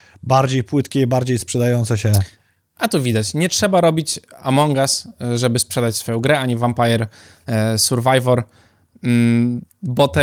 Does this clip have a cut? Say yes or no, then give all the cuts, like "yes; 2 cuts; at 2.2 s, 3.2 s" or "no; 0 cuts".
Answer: no; 0 cuts